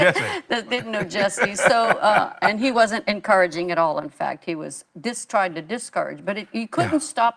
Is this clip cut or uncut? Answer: uncut